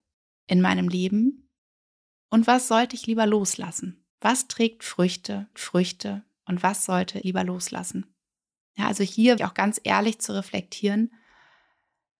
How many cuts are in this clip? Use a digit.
4